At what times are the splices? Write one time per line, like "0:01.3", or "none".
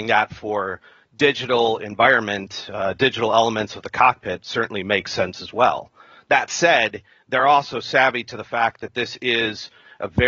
none